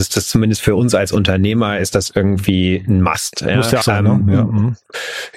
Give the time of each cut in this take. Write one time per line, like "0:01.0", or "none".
0:03.8